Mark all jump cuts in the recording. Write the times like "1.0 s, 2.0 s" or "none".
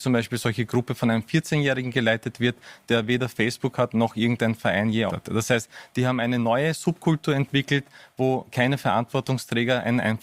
5.1 s

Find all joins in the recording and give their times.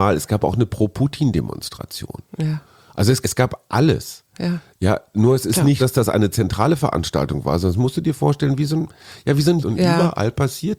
3.2 s, 5.8 s, 9.6 s

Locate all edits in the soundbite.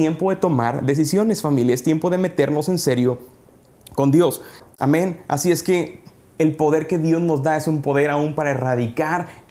none

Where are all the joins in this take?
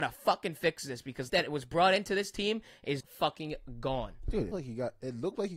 1.3 s, 3.0 s, 4.5 s

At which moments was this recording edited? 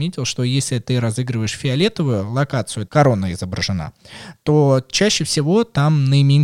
2.9 s

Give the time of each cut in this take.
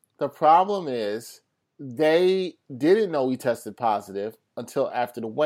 1.6 s

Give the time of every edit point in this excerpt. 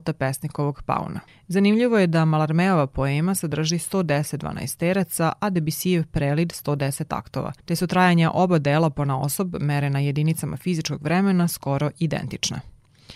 1.3 s, 7.6 s

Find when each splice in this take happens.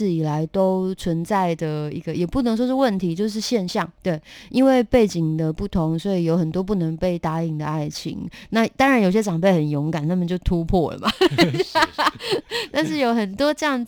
4.0 s

